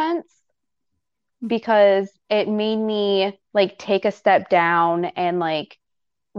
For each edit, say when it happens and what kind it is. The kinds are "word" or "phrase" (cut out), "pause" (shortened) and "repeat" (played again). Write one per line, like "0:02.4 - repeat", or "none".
0:03.4 - pause